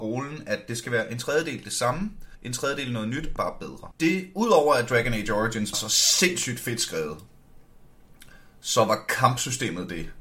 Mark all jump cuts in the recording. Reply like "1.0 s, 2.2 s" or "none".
2.3 s, 3.4 s, 3.9 s, 5.7 s

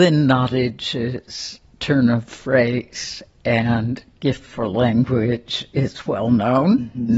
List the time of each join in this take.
none

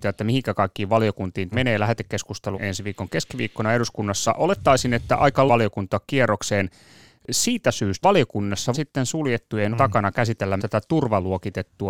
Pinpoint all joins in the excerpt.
1.5 s, 2.5 s, 4.3 s, 5.5 s, 8.0 s, 8.7 s, 9.7 s, 10.6 s

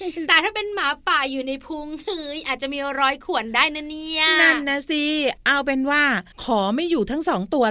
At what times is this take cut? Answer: 6.3 s

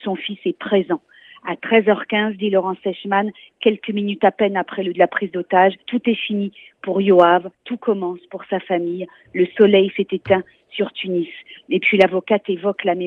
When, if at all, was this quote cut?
4.9 s, 5.8 s, 7.5 s

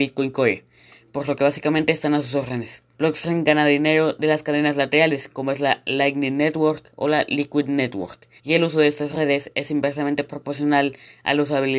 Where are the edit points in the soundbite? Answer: 2.9 s, 8.4 s

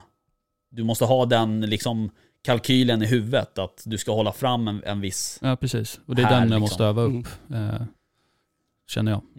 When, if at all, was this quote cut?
none

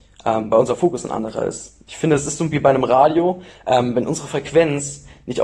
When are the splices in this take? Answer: 2.5 s

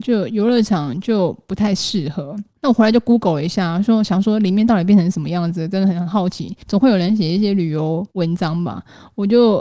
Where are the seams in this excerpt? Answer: 2.5 s, 6.6 s, 8.1 s

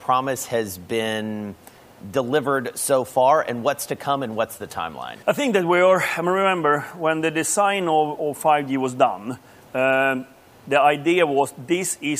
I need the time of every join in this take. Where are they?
5.2 s

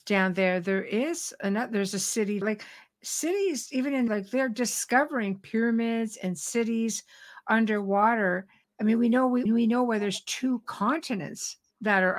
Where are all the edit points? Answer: 2.4 s, 4.1 s, 8.6 s, 9.5 s

